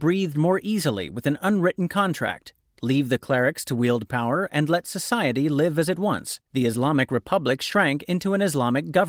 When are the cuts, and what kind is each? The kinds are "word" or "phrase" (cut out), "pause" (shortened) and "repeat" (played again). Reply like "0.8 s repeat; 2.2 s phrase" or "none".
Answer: 6.5 s pause